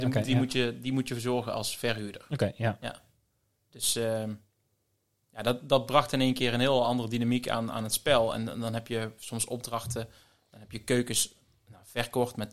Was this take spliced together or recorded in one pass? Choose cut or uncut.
uncut